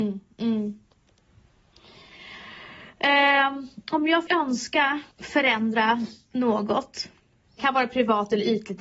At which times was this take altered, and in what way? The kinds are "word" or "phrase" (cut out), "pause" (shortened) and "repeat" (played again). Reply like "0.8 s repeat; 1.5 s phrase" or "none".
4.3 s word; 5.1 s pause; 7.6 s word